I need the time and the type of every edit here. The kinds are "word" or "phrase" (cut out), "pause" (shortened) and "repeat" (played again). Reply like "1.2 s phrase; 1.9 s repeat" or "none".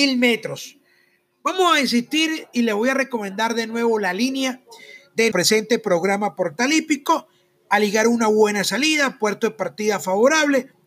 5.3 s word